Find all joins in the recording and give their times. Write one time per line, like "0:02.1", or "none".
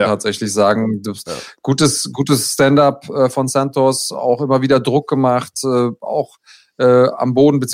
none